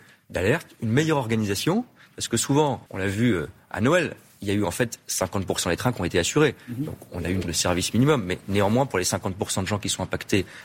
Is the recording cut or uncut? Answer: cut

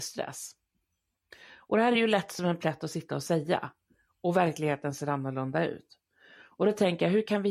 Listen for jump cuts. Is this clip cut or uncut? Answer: uncut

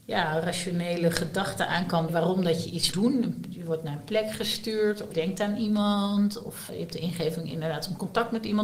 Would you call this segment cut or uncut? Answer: cut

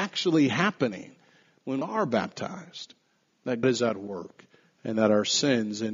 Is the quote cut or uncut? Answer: cut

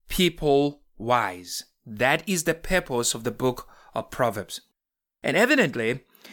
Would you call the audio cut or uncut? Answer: uncut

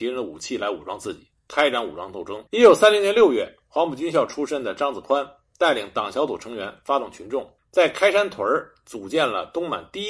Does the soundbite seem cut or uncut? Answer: cut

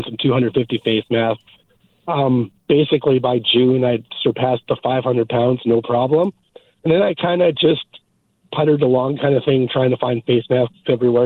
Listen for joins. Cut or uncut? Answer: uncut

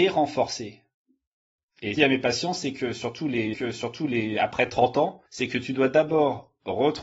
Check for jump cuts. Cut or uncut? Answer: cut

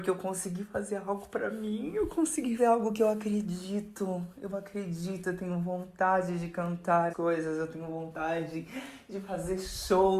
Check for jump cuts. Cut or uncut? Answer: cut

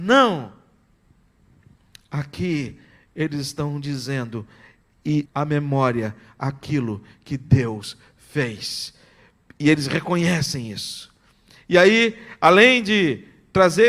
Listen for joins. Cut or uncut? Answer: cut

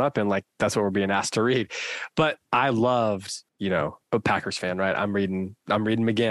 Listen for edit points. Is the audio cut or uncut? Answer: cut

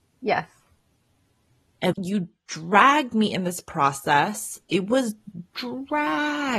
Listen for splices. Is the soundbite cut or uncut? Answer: cut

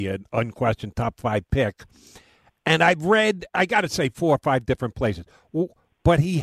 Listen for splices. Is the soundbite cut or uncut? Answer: uncut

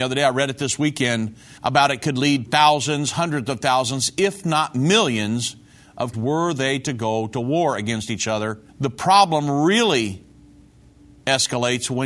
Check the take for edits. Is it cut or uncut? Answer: cut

